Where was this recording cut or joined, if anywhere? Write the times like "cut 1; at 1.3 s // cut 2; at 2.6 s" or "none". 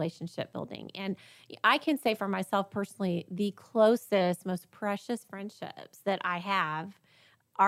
none